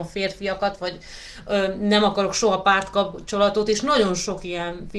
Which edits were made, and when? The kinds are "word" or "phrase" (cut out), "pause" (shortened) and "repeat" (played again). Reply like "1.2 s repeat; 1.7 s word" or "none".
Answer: none